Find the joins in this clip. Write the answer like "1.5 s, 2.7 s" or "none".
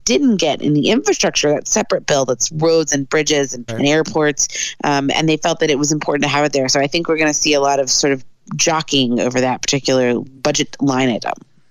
3.7 s